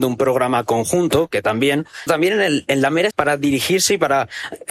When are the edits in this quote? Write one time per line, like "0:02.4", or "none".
0:02.1
0:03.1

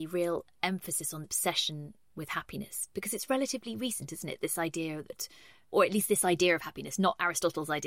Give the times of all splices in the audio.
0:01.2
0:05.7

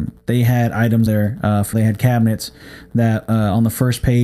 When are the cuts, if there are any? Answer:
0:01.1
0:01.7

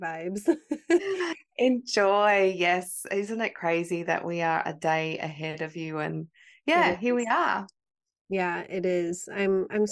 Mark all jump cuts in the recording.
none

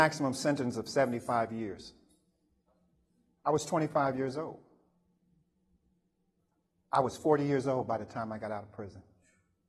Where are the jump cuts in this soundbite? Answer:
none

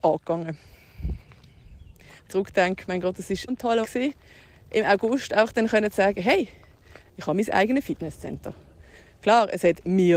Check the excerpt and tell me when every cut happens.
0:02.3
0:03.5
0:03.8

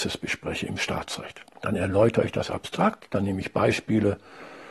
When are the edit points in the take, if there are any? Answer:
0:01.5

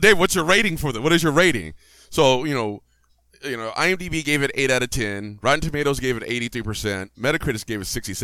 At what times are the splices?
none

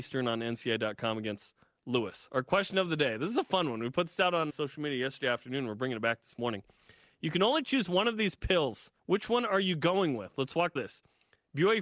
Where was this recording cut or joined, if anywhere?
0:04.5
0:09.0
0:10.8

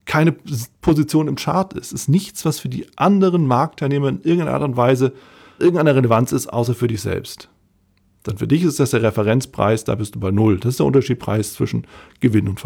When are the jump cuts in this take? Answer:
0:05.6

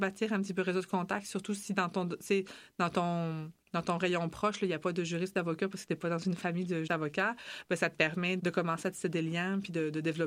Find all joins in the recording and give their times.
0:03.6
0:06.9
0:08.4

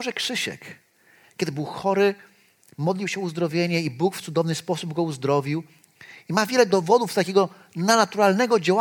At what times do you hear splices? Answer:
none

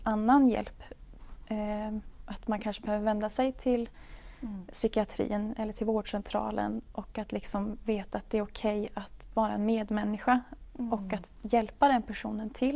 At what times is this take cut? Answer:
none

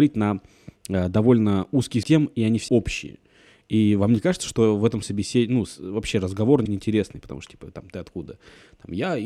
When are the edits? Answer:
0:02.0
0:02.7
0:05.0
0:06.7

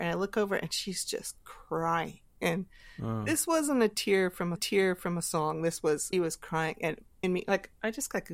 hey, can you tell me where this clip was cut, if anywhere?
0:04.6
0:06.1
0:07.2

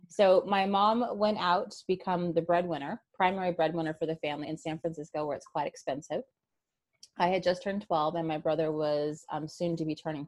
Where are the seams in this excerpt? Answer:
0:03.1
0:04.4

